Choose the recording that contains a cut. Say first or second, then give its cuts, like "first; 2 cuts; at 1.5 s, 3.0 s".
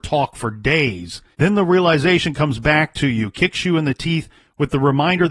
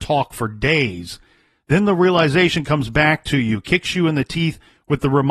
first; 1 cut; at 1.3 s